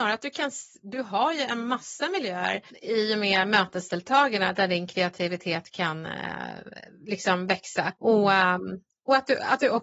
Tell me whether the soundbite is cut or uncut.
cut